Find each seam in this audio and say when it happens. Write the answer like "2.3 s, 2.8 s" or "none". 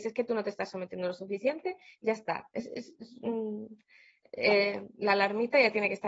none